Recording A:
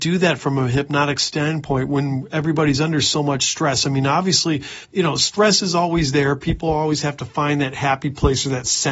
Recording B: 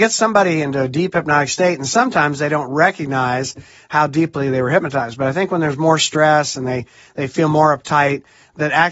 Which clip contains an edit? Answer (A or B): A